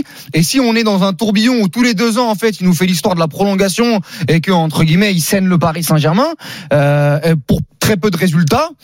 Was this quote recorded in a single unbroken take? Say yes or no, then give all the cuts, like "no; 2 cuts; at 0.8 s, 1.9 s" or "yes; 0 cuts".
yes; 0 cuts